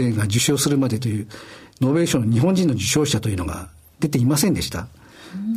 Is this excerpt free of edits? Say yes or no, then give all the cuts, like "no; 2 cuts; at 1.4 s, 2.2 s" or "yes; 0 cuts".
yes; 0 cuts